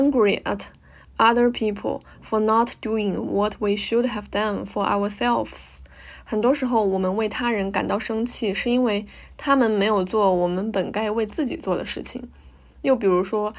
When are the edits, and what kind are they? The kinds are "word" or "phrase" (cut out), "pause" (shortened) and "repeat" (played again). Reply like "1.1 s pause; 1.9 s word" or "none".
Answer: none